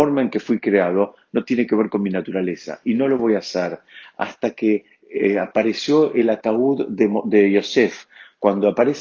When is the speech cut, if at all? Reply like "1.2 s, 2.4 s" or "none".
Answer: none